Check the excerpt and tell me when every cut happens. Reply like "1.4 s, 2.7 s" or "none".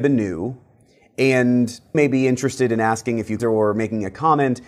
1.9 s, 3.4 s